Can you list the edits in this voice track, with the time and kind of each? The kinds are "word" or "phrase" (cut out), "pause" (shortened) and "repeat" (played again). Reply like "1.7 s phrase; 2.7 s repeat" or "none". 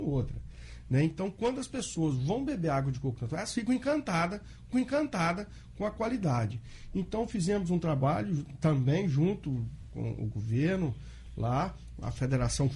4.7 s repeat; 9.9 s word